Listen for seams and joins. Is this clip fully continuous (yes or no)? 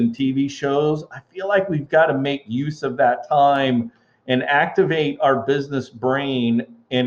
yes